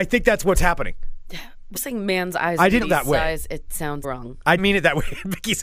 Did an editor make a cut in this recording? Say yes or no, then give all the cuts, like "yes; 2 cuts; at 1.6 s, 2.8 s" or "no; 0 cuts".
yes; 4 cuts; at 1.8 s, 2.8 s, 4.0 s, 4.6 s